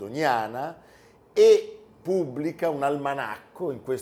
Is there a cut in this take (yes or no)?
no